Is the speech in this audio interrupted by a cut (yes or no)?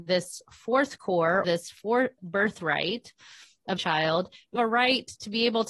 yes